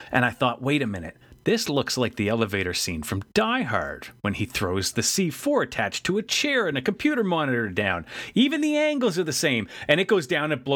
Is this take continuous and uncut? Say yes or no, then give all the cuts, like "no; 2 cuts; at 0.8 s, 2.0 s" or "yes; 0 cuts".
yes; 0 cuts